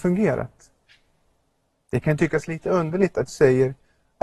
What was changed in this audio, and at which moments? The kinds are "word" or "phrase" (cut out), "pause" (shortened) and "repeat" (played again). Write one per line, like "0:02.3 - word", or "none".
0:03.3 - word